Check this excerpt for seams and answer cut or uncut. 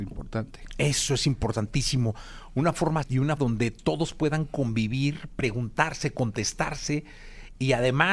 cut